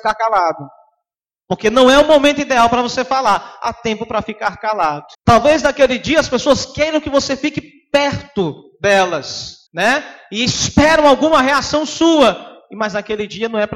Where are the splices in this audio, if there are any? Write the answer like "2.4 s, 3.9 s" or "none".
5.1 s, 9.7 s